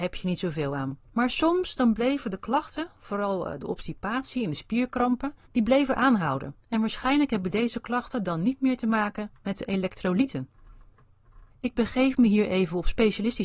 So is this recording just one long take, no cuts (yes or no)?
no